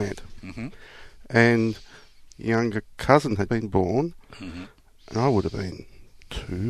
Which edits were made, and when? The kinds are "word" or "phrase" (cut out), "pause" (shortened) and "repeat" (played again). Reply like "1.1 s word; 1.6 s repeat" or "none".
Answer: 2.3 s word; 3.5 s word